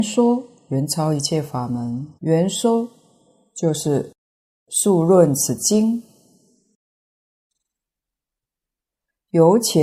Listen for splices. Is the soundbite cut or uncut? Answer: cut